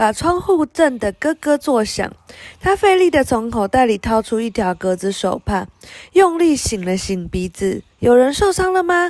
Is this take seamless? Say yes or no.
no